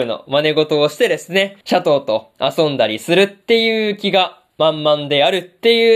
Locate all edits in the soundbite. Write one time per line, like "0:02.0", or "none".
0:01.6

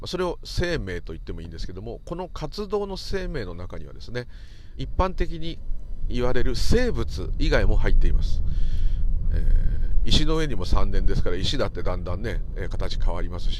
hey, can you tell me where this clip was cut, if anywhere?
0:04.8

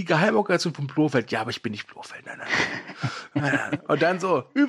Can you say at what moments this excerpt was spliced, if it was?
none

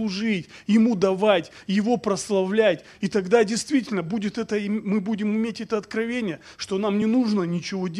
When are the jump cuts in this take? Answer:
none

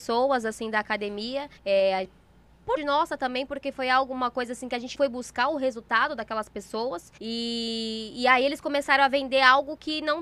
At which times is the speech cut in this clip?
0:01.6
0:02.8
0:04.9
0:07.2

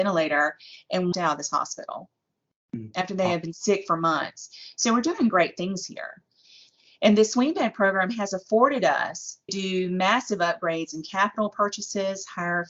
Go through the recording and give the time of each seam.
0:01.1
0:09.5

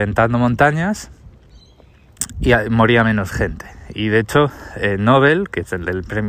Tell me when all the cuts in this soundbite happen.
none

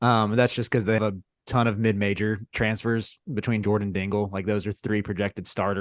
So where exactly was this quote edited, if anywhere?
0:01.0
0:03.6

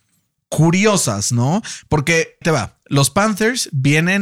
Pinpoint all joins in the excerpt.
0:02.4

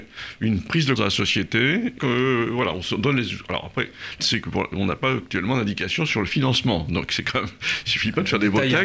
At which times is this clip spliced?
0:01.0
0:02.0
0:04.2

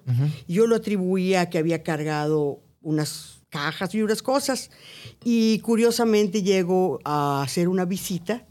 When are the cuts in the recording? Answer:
0:03.4

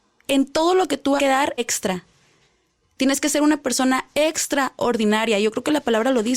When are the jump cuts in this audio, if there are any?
0:01.2
0:01.6

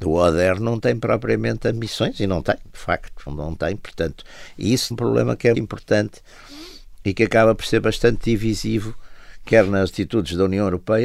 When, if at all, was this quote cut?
0:03.3
0:04.9
0:05.5

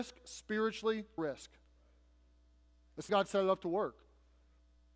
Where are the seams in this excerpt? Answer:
0:01.2
0:03.1

